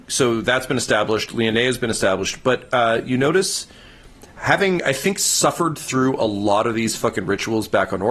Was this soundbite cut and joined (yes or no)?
no